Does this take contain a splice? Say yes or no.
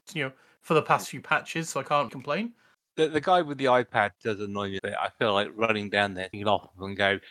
yes